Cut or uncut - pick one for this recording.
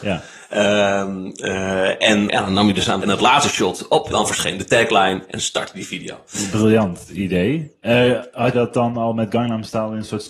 cut